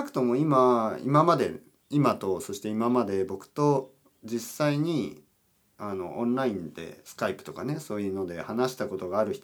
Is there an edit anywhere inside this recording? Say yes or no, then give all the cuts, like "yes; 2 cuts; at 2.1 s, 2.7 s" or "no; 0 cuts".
no; 0 cuts